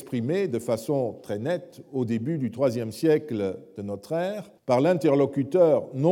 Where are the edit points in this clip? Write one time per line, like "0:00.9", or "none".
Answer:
0:04.6